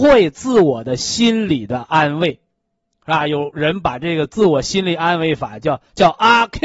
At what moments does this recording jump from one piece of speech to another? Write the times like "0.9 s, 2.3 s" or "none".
2.5 s